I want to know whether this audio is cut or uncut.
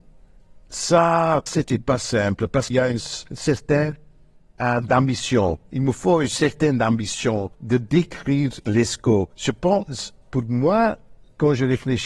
cut